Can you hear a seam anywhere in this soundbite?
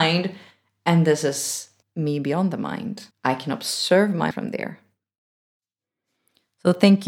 yes; 3 cuts; at 1.8 s, 3.1 s, 4.3 s

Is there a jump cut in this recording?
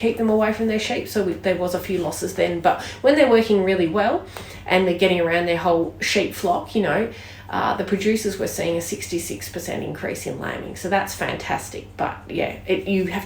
no; 0 cuts

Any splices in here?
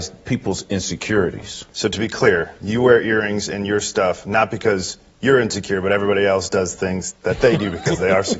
yes; 1 cut; at 1.7 s

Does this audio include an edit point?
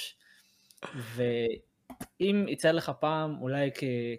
no; 0 cuts

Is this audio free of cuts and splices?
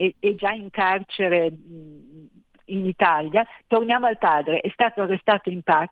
yes; 0 cuts

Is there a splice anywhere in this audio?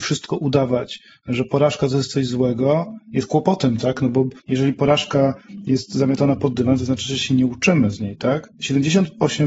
yes; 2 cuts; at 4.4 s, 8.5 s

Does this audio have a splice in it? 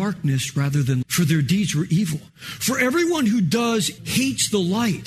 yes; 3 cuts; at 1.0 s, 2.3 s, 4.0 s

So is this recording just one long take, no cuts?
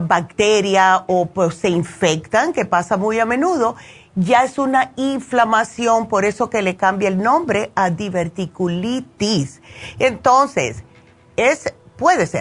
yes; 0 cuts

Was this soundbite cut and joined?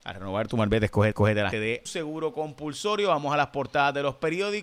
yes; 3 cuts; at 1.1 s, 1.5 s, 1.9 s

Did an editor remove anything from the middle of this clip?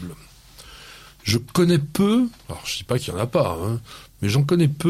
yes; 1 cut; at 2.4 s

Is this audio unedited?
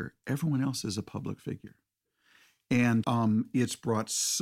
no; 1 cut; at 3.0 s

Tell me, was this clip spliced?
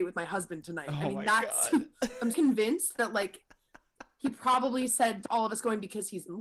yes; 2 cuts; at 2.3 s, 5.2 s

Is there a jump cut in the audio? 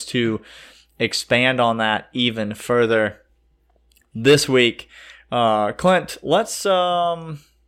no; 0 cuts

